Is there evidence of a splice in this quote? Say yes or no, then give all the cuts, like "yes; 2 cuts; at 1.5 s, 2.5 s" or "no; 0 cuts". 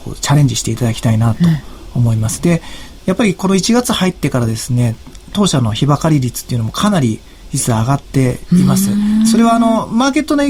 no; 0 cuts